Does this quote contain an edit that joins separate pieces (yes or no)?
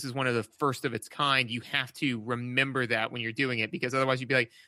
no